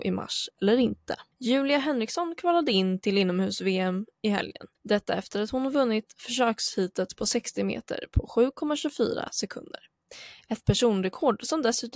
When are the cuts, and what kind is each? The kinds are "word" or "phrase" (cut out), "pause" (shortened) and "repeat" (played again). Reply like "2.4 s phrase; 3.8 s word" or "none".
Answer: 1.3 s pause; 4.7 s pause